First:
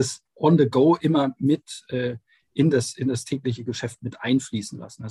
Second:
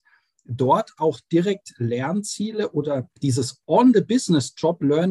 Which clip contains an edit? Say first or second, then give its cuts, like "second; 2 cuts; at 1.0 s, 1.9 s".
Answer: second; 1 cut; at 3.2 s